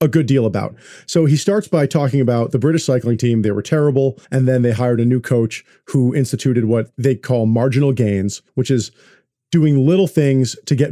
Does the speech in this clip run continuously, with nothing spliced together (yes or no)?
no